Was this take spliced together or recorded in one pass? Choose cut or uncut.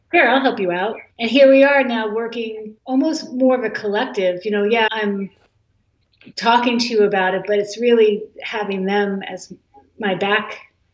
cut